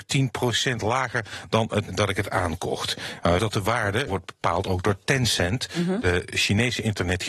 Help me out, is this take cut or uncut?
cut